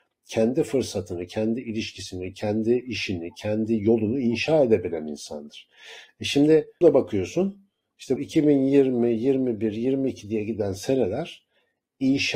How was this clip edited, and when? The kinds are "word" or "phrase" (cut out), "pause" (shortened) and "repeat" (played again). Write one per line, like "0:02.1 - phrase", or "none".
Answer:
0:06.8 - word
0:08.2 - word